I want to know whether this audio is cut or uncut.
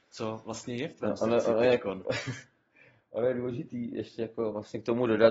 uncut